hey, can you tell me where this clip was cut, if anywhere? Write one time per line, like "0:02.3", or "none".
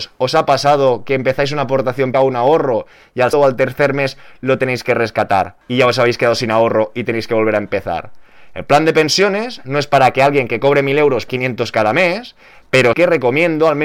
0:02.1
0:03.3
0:11.3
0:12.9